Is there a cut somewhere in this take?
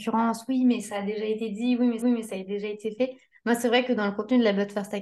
yes; 1 cut; at 2.0 s

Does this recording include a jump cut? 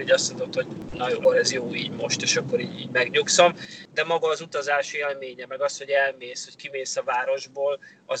yes; 1 cut; at 1.2 s

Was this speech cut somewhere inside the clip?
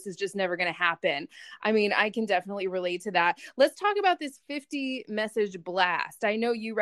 no; 0 cuts

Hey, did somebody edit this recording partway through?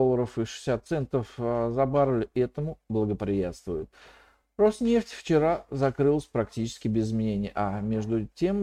no; 0 cuts

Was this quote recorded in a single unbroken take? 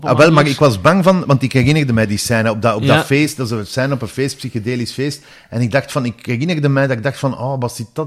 yes; 0 cuts

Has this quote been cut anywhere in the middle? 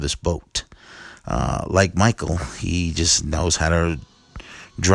no; 0 cuts

